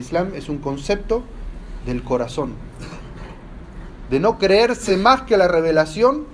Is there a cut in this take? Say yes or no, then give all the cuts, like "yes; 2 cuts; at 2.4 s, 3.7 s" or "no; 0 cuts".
no; 0 cuts